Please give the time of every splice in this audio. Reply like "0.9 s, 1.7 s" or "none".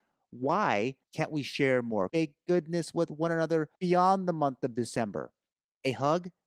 1.0 s, 2.1 s, 3.8 s